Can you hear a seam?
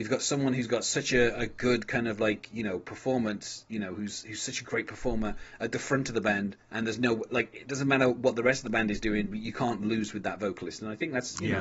no; 0 cuts

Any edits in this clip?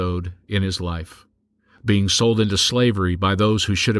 no; 0 cuts

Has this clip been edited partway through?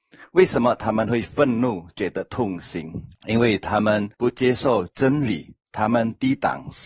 yes; 2 cuts; at 3.1 s, 4.1 s

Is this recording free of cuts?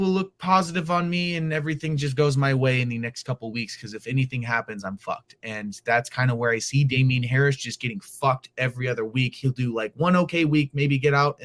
yes; 0 cuts

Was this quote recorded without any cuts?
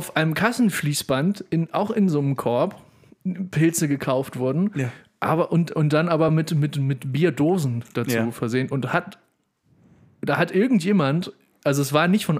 yes; 0 cuts

